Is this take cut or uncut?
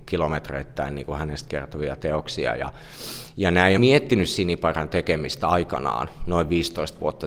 cut